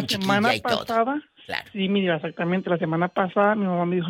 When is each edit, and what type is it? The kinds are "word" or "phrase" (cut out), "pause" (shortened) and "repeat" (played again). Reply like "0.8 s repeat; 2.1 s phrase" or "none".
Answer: none